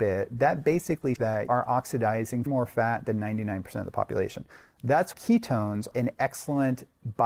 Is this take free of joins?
no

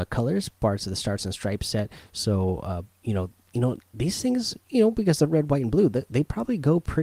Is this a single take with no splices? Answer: no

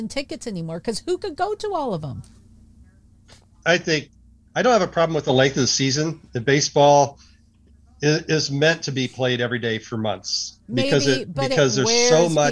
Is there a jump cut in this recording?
no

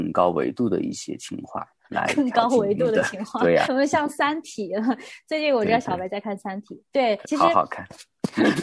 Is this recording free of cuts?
no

